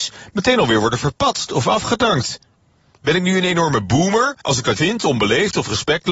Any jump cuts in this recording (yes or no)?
yes